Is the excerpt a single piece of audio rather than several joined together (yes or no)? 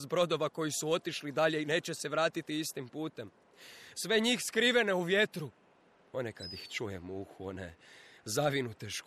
yes